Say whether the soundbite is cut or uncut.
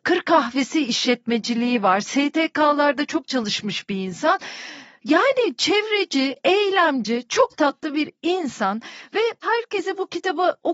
uncut